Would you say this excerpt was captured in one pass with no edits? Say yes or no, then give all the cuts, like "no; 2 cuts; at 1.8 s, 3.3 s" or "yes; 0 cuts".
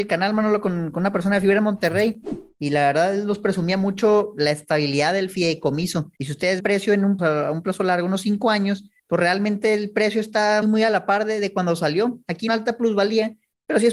no; 6 cuts; at 6.2 s, 6.6 s, 7.2 s, 9.0 s, 10.6 s, 12.5 s